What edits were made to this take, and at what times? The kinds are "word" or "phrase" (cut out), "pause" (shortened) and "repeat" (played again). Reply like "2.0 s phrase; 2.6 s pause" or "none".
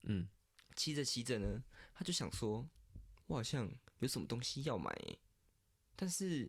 3.2 s word